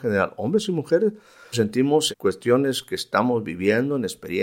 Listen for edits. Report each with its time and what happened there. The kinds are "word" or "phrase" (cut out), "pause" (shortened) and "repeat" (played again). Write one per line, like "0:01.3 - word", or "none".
0:01.5 - word
0:02.1 - word